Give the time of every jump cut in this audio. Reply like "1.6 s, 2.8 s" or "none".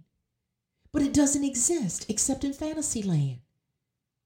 none